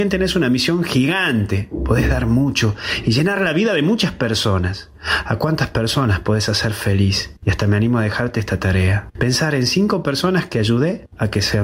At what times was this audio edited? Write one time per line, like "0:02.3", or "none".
none